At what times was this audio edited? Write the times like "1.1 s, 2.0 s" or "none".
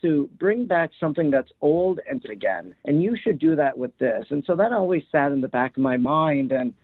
2.2 s